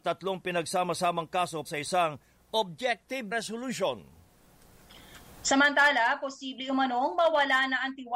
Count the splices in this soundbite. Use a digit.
2